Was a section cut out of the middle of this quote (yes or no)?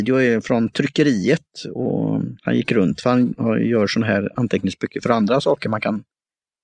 yes